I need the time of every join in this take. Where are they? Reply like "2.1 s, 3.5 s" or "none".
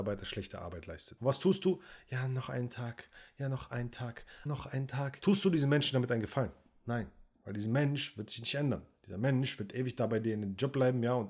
4.5 s